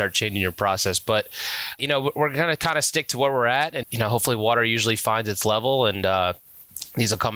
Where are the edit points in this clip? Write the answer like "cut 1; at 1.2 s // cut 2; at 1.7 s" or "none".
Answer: cut 1; at 1.8 s // cut 2; at 3.8 s